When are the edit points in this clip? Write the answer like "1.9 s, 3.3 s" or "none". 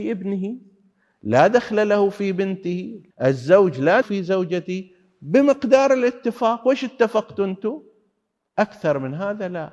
3.1 s, 4.0 s